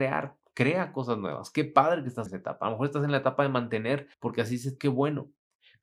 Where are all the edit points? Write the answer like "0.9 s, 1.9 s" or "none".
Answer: 2.3 s, 4.1 s, 4.8 s